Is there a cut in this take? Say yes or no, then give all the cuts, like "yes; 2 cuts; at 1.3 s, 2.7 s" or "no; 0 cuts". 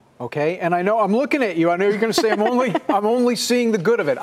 no; 0 cuts